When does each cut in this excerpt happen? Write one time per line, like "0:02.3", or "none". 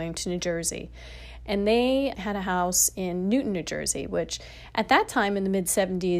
0:02.1